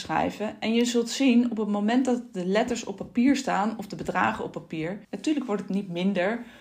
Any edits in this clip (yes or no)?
yes